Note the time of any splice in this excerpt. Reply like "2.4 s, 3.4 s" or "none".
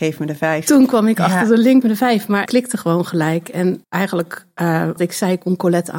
1.8 s, 2.5 s, 3.8 s, 5.0 s